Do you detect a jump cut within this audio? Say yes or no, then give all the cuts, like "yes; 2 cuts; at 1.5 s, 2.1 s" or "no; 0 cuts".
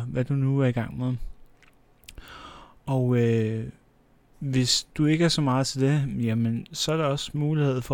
no; 0 cuts